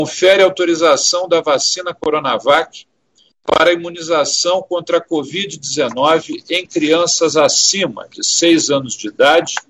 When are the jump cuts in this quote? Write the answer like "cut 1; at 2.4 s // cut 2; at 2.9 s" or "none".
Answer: none